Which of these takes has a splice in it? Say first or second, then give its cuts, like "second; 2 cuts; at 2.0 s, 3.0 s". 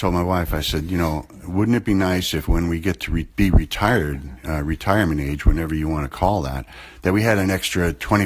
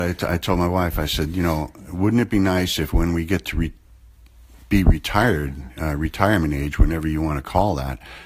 first; 1 cut; at 3.3 s